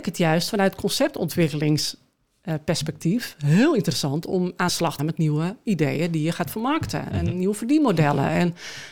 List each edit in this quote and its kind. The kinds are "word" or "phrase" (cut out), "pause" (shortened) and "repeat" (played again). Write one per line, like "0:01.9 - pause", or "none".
0:04.7 - word
0:05.0 - word
0:07.1 - word